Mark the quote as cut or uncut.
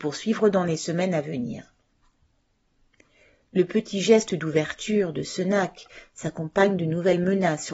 uncut